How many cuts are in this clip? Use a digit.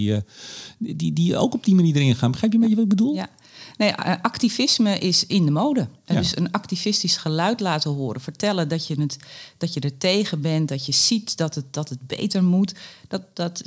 1